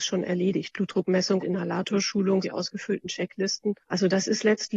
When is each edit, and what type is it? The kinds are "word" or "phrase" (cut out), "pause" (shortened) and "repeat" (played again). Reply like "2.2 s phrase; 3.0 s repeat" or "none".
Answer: 1.4 s word; 2.4 s phrase; 3.8 s pause